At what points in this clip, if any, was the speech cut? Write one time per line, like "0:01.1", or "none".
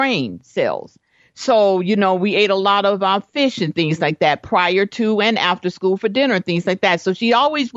none